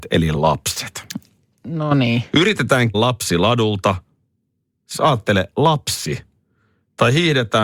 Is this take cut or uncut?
cut